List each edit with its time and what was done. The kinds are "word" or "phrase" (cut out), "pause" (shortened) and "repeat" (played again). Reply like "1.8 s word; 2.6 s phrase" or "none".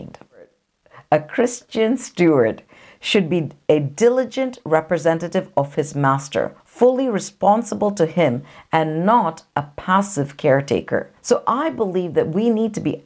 6.6 s pause; 11.2 s pause